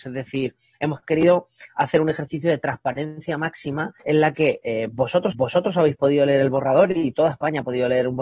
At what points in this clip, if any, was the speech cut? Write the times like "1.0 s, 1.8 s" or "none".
4.0 s, 5.3 s